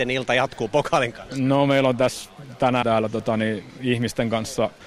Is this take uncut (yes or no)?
no